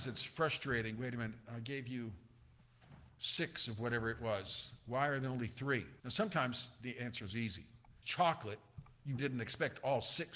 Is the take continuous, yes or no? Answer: no